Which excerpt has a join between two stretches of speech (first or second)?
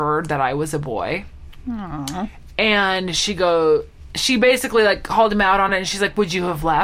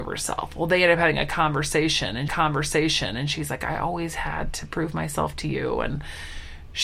second